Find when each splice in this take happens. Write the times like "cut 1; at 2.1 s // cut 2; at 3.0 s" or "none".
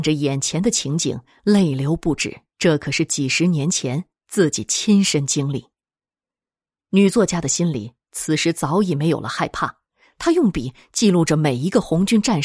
cut 1; at 2.5 s

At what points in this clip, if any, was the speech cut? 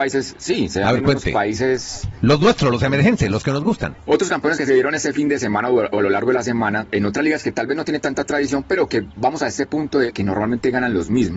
none

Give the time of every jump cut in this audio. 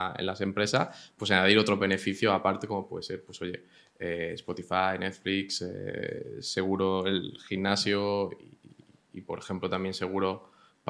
none

